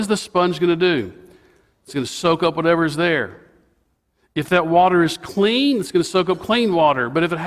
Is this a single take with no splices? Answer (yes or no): yes